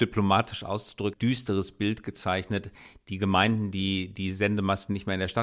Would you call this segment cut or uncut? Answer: cut